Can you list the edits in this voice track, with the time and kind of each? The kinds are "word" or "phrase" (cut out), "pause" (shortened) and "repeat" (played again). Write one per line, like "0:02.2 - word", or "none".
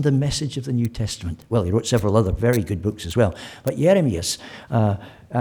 none